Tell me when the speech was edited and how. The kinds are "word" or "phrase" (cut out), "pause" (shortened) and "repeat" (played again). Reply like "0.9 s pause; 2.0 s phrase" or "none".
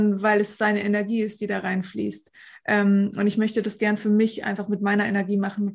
none